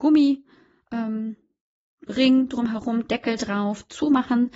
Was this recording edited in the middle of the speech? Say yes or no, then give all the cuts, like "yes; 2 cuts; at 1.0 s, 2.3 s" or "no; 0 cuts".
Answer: no; 0 cuts